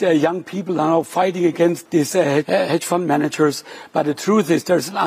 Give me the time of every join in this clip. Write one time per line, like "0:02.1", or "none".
0:01.9
0:02.4